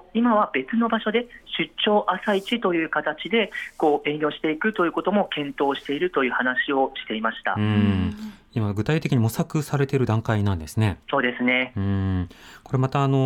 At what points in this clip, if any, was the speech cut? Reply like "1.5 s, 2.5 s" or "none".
11.0 s